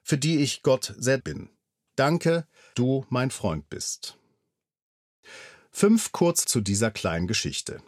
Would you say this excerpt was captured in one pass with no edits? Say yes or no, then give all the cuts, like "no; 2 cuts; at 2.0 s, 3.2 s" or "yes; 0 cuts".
no; 3 cuts; at 1.2 s, 2.7 s, 6.4 s